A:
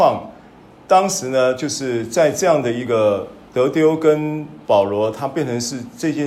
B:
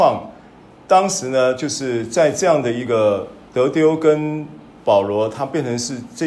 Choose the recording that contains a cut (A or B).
A